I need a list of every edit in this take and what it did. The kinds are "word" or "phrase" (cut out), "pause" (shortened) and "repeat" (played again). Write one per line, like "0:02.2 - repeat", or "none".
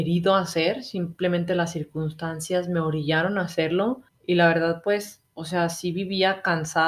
0:04.1 - pause